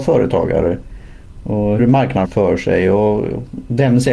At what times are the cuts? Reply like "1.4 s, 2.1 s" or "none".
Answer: 1.8 s, 2.2 s